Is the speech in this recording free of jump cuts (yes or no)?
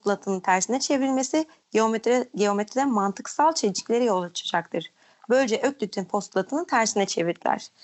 yes